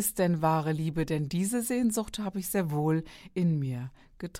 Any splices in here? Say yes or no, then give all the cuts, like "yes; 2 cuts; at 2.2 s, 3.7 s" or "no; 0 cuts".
no; 0 cuts